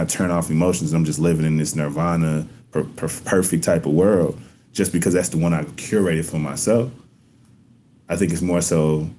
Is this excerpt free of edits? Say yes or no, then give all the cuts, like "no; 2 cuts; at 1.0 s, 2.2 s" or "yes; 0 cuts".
yes; 0 cuts